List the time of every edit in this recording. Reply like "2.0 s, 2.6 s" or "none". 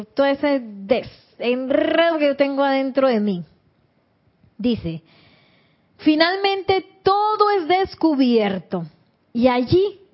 none